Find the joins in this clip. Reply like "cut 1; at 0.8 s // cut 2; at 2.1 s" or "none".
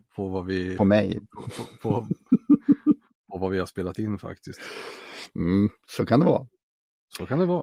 none